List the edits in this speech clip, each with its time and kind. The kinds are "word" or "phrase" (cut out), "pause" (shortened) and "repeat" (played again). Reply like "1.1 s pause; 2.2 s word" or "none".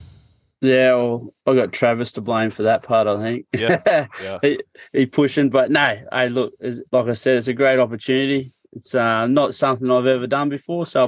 1.4 s pause; 4.9 s pause; 6.9 s pause